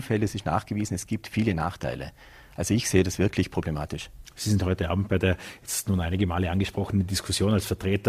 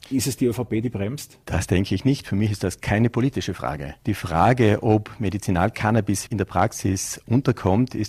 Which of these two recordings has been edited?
second; 3 cuts; at 1.4 s, 4.0 s, 6.3 s

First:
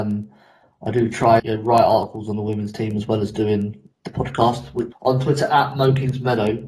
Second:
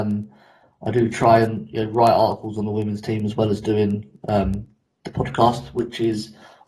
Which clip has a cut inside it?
first; 3 cuts; at 1.4 s, 3.9 s, 4.9 s

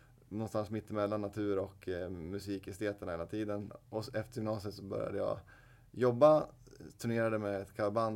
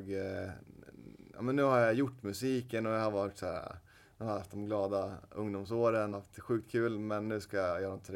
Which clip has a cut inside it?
second; 1 cut; at 6.1 s

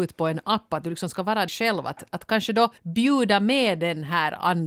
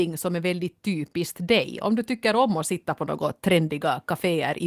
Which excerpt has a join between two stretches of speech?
first; 2 cuts; at 1.5 s, 2.8 s

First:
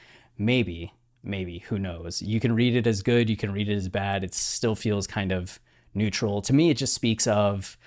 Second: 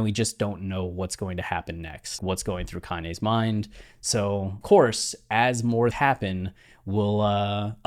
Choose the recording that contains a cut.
second; 3 cuts; at 2.2 s, 4.6 s, 5.9 s

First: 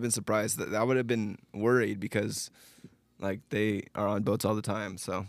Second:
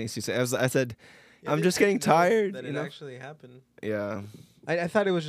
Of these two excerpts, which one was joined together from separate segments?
second; 2 cuts; at 1.5 s, 3.7 s

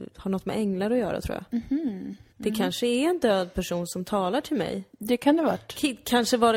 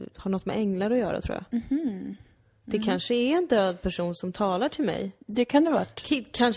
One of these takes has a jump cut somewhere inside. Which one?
first; 1 cut; at 2.3 s

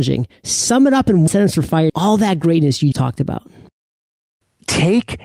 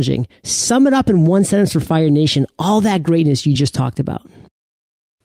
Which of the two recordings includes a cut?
first; 3 cuts; at 1.3 s, 1.9 s, 2.9 s

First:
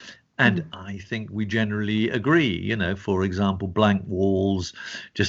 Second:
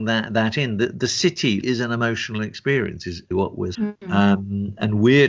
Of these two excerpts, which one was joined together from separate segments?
second; 3 cuts; at 1.6 s, 3.3 s, 3.7 s

